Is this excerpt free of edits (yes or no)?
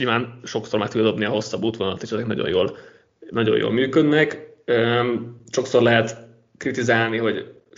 yes